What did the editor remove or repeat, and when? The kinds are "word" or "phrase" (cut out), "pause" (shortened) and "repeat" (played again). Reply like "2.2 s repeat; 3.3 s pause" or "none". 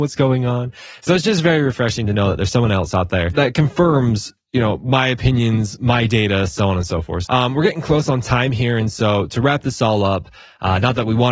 7.2 s word